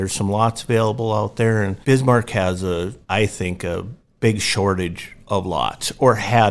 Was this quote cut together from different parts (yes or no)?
yes